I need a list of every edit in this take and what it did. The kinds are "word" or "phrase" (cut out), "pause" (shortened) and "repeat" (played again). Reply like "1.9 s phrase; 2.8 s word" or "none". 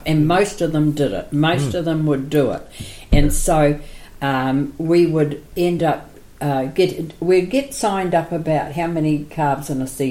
none